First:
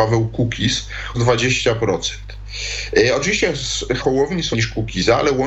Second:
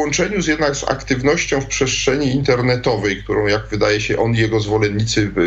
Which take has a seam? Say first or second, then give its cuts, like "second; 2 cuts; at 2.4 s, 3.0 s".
first; 3 cuts; at 1.1 s, 4.0 s, 4.5 s